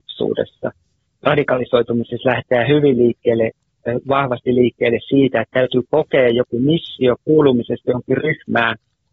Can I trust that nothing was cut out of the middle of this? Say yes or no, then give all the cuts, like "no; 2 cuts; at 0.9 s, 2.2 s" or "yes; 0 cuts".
yes; 0 cuts